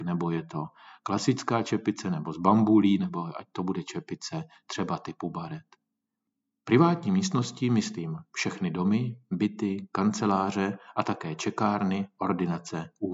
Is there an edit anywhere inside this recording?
no; 0 cuts

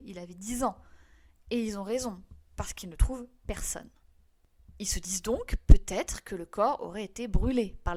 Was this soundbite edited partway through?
no; 0 cuts

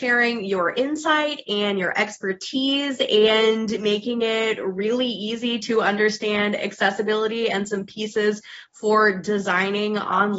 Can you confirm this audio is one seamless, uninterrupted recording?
yes; 0 cuts

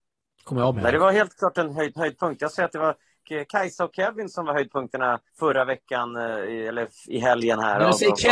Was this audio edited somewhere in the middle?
yes; 4 cuts; at 2.0 s, 2.5 s, 3.2 s, 5.3 s

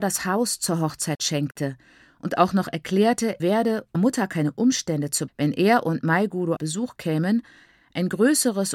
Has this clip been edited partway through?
yes; 4 cuts; at 3.4 s, 3.9 s, 5.3 s, 6.6 s

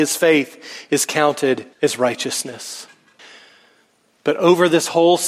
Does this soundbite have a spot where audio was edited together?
yes; 2 cuts; at 1.7 s, 3.2 s

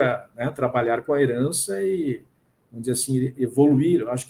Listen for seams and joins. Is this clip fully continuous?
yes; 0 cuts

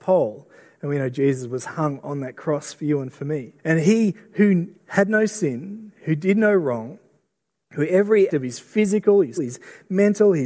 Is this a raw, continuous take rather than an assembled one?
no; 4 cuts; at 3.6 s, 4.8 s, 8.3 s, 9.4 s

